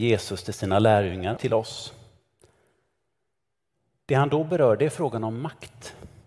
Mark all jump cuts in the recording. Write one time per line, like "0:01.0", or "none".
0:01.4